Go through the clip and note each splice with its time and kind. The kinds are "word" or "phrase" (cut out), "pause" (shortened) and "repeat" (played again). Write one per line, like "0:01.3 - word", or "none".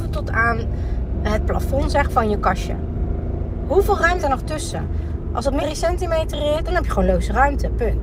0:01.1 - word
0:02.1 - word
0:04.2 - word
0:05.6 - word
0:06.6 - word